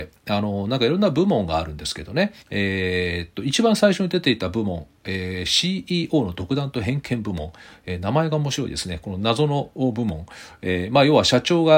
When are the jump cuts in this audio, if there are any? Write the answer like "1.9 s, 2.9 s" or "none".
2.4 s